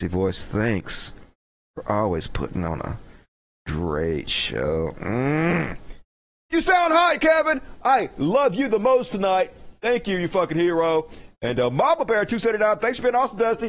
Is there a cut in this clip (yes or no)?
no